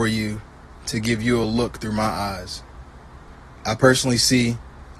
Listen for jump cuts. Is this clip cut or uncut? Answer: uncut